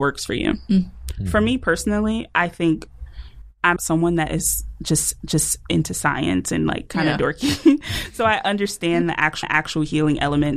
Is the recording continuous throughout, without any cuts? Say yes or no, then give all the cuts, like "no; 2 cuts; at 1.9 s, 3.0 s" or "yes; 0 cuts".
no; 3 cuts; at 3.8 s, 5.2 s, 9.4 s